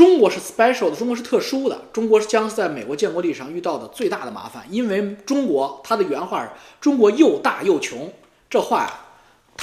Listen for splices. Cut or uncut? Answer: uncut